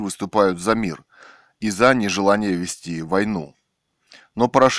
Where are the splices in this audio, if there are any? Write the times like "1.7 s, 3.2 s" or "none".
none

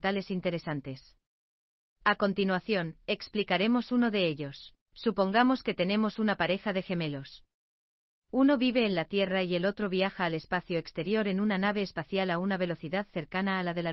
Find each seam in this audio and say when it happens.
4.8 s

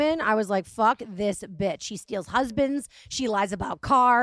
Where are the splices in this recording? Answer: none

